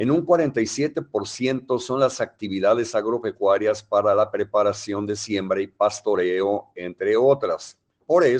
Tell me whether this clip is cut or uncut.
uncut